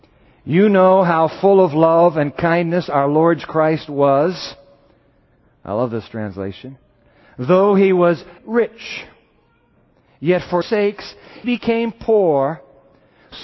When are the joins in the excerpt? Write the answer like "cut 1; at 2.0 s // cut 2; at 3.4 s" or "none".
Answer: cut 1; at 3.4 s // cut 2; at 8.4 s // cut 3; at 10.6 s // cut 4; at 11.4 s